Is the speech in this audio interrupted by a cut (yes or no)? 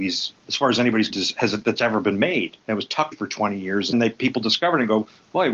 yes